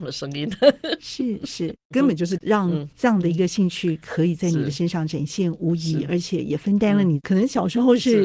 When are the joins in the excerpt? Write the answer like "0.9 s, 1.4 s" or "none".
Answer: 2.4 s